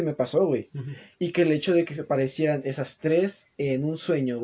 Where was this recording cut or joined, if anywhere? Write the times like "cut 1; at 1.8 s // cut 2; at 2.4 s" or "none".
cut 1; at 3.5 s

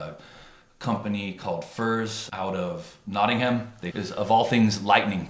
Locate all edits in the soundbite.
cut 1; at 2.3 s // cut 2; at 3.9 s

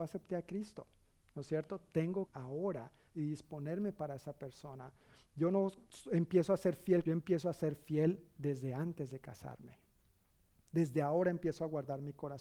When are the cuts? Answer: cut 1; at 2.3 s // cut 2; at 7.1 s

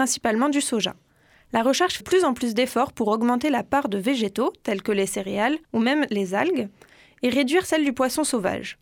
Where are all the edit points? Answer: cut 1; at 2.0 s // cut 2; at 5.6 s

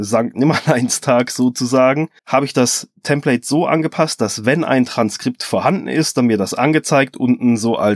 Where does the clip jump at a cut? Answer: cut 1; at 2.2 s

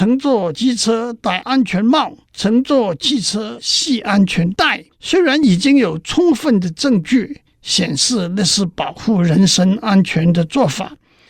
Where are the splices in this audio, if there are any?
cut 1; at 2.3 s // cut 2; at 4.9 s

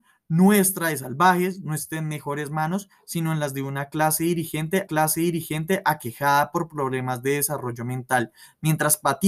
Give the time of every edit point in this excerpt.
cut 1; at 4.9 s

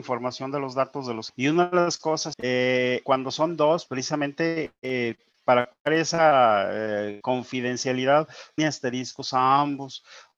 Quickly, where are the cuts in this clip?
cut 1; at 1.3 s // cut 2; at 2.3 s // cut 3; at 3.0 s // cut 4; at 3.9 s // cut 5; at 8.6 s

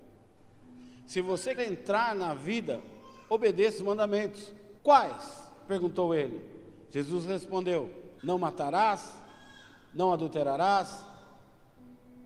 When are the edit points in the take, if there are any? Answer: cut 1; at 1.6 s // cut 2; at 3.8 s // cut 3; at 4.8 s // cut 4; at 8.2 s

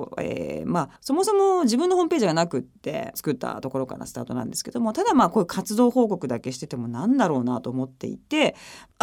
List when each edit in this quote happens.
cut 1; at 1.0 s

